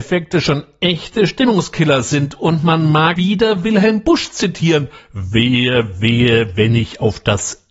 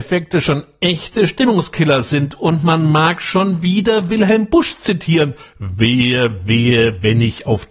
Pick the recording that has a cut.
first; 1 cut; at 3.2 s

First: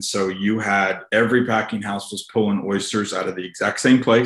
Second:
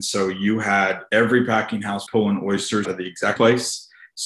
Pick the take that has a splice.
second; 3 cuts; at 2.1 s, 2.8 s, 3.4 s

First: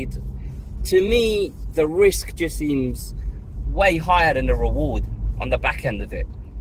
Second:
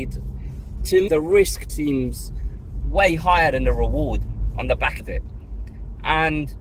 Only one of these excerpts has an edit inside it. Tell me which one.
second; 3 cuts; at 1.1 s, 1.7 s, 5.0 s

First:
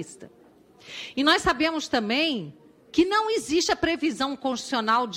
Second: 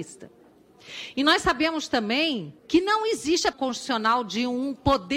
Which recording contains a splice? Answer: second; 2 cuts; at 2.6 s, 3.5 s

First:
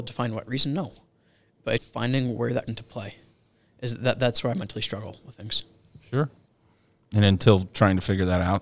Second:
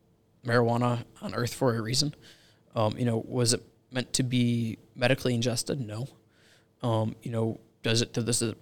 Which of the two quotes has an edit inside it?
first; 2 cuts; at 1.8 s, 2.7 s

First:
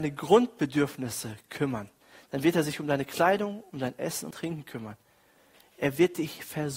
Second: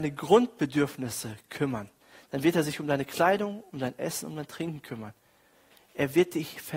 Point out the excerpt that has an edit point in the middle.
first; 1 cut; at 4.3 s

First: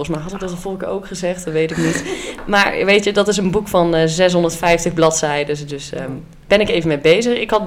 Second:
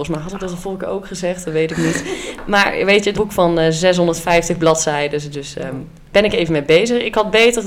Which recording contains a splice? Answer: second; 1 cut; at 3.1 s

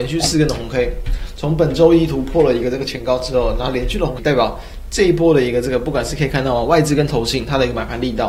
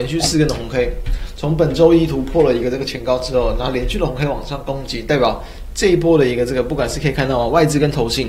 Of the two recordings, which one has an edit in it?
first; 1 cut; at 4.2 s

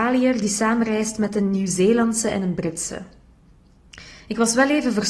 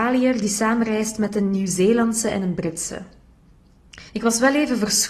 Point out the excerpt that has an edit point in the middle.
second; 1 cut; at 4.1 s

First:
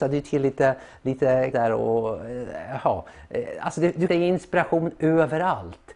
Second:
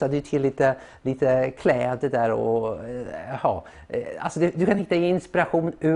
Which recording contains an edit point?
first; 2 cuts; at 1.5 s, 4.1 s

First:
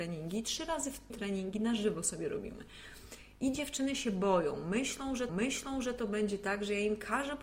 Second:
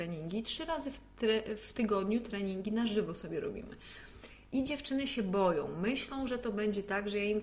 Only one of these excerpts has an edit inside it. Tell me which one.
first; 2 cuts; at 1.1 s, 5.3 s

